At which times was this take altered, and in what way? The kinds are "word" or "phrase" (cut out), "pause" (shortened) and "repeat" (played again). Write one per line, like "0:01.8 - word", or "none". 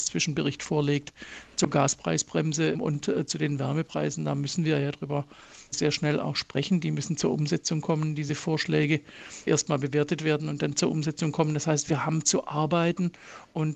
0:09.5 - word